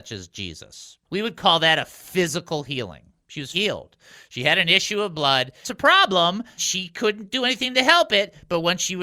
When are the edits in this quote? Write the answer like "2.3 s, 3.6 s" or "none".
1.0 s, 3.5 s, 5.6 s, 6.6 s